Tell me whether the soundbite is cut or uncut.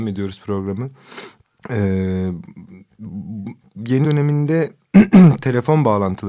cut